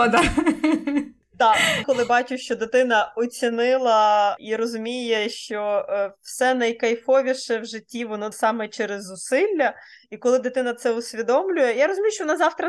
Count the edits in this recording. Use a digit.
2